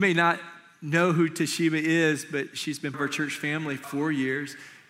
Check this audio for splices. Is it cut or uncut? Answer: cut